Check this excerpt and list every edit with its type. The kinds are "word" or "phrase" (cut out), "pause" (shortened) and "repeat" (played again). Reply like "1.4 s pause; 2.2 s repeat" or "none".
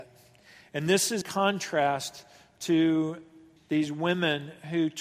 1.2 s word; 3.6 s word